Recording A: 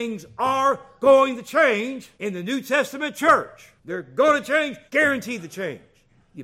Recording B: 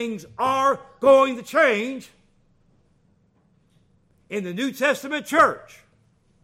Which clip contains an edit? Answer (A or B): A